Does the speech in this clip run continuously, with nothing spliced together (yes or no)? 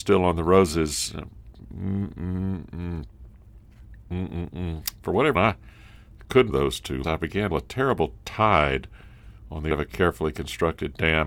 no